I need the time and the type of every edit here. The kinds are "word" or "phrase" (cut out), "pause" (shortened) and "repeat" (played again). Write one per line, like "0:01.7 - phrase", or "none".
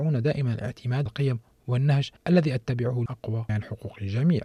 0:01.1 - word
0:02.2 - pause
0:03.1 - phrase
0:03.5 - word